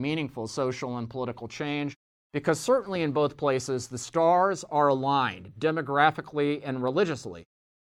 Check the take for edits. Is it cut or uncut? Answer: uncut